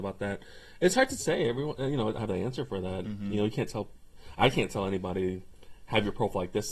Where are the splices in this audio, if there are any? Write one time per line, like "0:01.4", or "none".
0:02.2